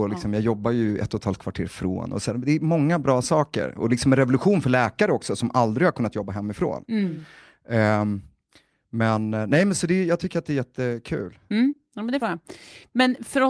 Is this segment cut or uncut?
cut